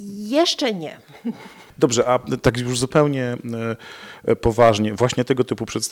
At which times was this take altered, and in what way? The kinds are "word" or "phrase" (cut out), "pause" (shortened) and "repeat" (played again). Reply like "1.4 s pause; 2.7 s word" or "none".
none